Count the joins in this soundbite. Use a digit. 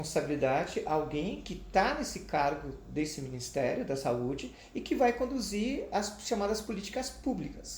0